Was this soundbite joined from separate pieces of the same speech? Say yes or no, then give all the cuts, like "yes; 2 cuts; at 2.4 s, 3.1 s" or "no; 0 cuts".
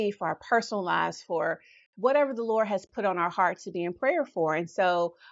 no; 0 cuts